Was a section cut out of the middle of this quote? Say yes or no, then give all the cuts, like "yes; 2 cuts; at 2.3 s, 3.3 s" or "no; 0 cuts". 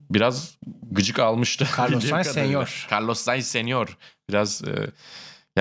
no; 0 cuts